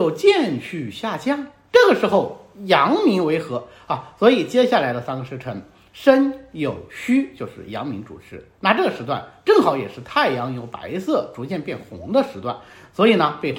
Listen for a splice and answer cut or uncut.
uncut